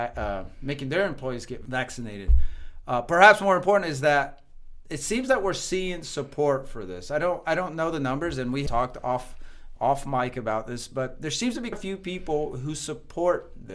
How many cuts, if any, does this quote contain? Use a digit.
3